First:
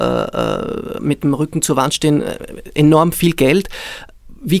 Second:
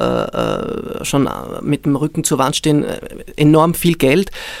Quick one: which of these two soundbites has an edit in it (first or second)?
first